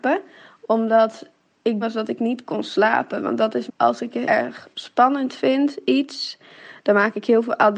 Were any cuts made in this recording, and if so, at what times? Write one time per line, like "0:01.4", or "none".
0:01.8
0:03.7
0:04.2